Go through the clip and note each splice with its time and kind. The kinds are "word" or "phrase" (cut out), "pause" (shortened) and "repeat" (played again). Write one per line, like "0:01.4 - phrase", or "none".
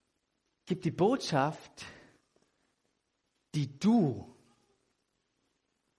none